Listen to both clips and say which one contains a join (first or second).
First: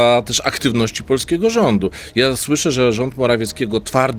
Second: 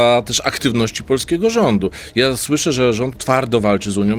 second